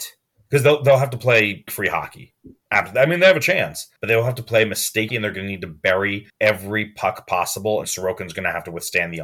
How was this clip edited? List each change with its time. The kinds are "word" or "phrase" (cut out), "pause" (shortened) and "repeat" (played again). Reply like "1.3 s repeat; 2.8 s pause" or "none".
1.7 s word; 4.0 s pause; 5.1 s phrase; 6.3 s pause; 7.8 s word